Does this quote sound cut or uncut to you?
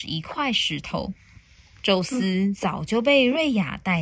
uncut